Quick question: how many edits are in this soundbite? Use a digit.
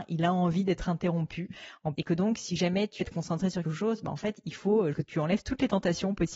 4